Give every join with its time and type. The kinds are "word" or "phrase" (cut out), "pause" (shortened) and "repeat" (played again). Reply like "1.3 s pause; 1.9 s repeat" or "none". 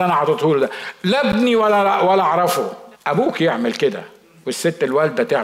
2.9 s pause